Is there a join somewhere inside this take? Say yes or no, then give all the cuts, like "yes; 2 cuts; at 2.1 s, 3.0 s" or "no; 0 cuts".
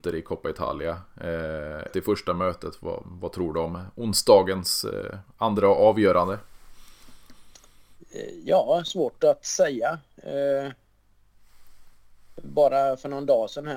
yes; 2 cuts; at 1.9 s, 3.0 s